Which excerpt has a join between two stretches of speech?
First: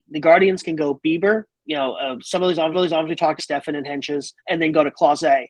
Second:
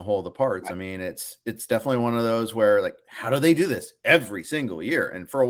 first; 4 cuts; at 1.5 s, 2.7 s, 3.4 s, 4.4 s

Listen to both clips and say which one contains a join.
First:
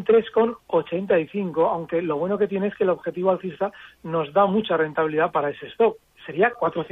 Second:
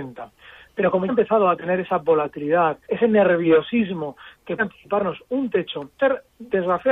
second; 4 cuts; at 1.1 s, 2.8 s, 4.6 s, 6.0 s

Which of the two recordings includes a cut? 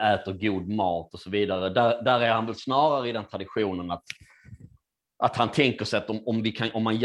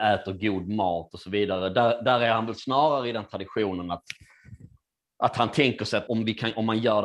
second; 1 cut; at 6.1 s

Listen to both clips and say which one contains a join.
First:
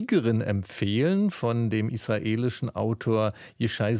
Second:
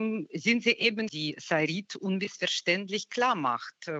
second; 1 cut; at 1.1 s

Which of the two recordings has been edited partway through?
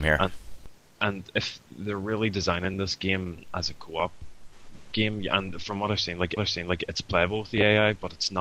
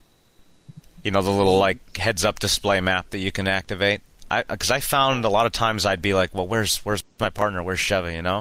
first; 1 cut; at 6.4 s

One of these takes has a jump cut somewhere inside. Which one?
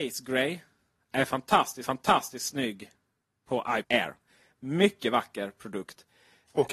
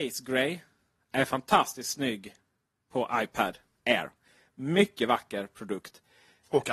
first; 2 cuts; at 1.8 s, 3.8 s

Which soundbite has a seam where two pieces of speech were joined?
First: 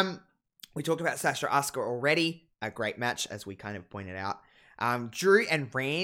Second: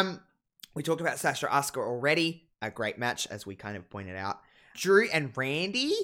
second; 1 cut; at 4.7 s

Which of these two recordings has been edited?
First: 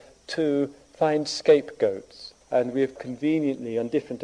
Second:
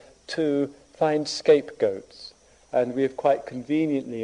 first; 2 cuts; at 2.4 s, 3.0 s

